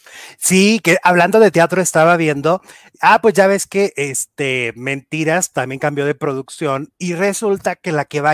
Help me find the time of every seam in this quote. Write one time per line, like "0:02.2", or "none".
none